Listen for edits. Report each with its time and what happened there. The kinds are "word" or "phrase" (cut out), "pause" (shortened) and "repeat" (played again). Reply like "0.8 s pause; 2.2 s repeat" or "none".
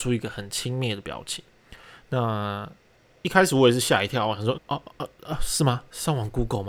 4.5 s word